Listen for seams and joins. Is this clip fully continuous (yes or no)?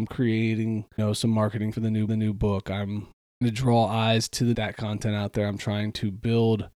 no